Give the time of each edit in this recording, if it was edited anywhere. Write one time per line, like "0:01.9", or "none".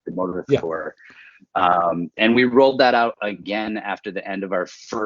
none